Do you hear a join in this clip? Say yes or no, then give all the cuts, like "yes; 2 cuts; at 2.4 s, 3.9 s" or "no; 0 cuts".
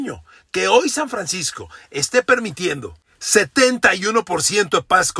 no; 0 cuts